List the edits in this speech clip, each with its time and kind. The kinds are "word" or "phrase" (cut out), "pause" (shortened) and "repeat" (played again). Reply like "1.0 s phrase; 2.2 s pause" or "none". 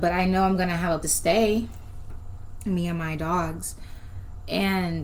1.0 s word